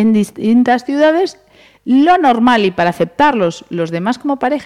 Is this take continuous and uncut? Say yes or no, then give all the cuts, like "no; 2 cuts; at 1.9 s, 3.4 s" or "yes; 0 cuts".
yes; 0 cuts